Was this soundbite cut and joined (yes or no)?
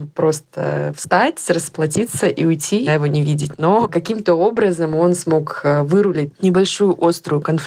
yes